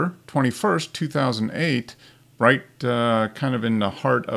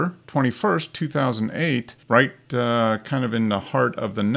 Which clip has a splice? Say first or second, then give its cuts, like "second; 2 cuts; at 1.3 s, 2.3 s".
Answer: second; 1 cut; at 2.0 s